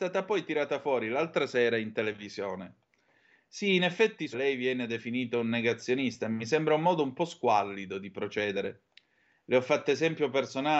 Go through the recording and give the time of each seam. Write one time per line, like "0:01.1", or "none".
0:04.3